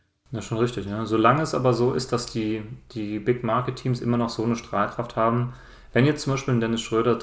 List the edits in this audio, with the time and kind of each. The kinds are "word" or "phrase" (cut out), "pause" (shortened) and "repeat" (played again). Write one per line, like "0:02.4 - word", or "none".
none